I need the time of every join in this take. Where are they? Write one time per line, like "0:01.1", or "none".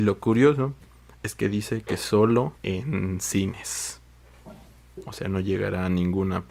0:02.6